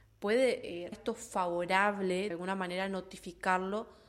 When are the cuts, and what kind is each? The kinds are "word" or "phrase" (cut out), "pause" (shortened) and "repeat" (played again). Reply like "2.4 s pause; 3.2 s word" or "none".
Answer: 0.9 s word; 2.3 s word

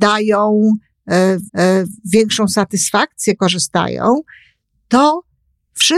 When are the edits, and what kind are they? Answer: 1.5 s repeat; 3.4 s phrase

